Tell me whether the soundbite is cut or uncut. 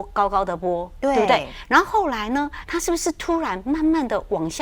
cut